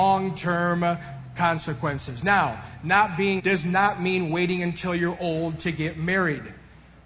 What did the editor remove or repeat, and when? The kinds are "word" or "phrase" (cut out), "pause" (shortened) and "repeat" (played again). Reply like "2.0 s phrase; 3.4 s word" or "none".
3.4 s word